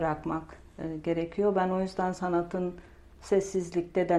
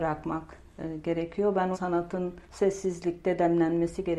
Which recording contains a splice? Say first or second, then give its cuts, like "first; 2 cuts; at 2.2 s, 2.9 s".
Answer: second; 2 cuts; at 1.7 s, 2.4 s